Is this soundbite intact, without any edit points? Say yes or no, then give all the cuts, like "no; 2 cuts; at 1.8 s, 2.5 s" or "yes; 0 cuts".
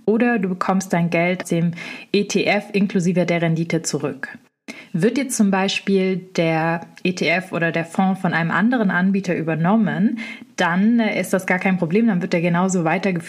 no; 1 cut; at 1.4 s